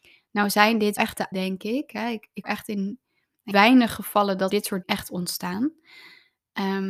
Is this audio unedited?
no; 6 cuts; at 1.0 s, 1.3 s, 2.4 s, 3.5 s, 4.5 s, 4.8 s

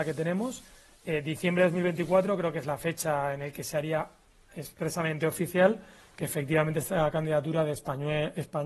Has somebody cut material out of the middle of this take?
no; 0 cuts

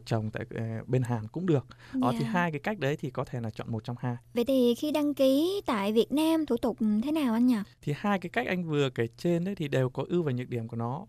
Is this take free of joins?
no; 2 cuts; at 4.2 s, 7.7 s

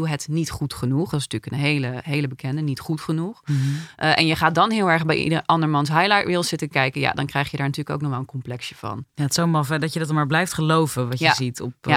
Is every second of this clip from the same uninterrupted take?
yes; 0 cuts

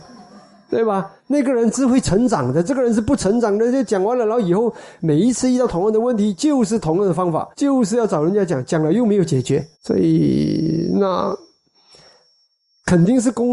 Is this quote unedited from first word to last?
no; 3 cuts; at 1.2 s, 7.5 s, 9.7 s

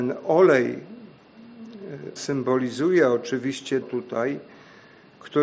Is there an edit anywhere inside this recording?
yes; 2 cuts; at 2.2 s, 3.8 s

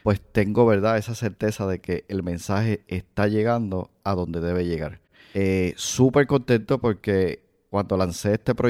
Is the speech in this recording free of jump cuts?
yes; 0 cuts

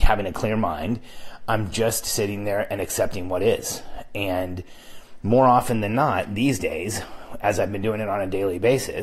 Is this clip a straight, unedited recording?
yes; 0 cuts

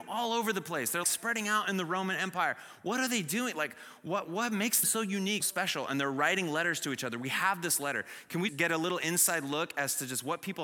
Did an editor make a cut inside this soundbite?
yes; 4 cuts; at 1.0 s, 4.8 s, 5.4 s, 8.5 s

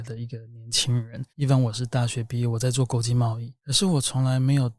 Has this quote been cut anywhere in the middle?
yes; 2 cuts; at 1.3 s, 3.6 s

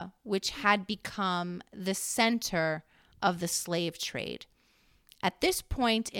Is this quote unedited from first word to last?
yes; 0 cuts

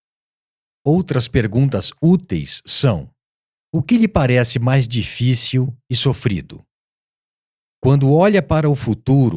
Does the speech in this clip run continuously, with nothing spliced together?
yes; 0 cuts

